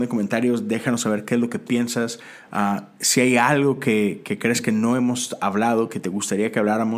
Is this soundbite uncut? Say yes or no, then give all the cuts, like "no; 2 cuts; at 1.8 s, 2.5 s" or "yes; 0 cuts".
yes; 0 cuts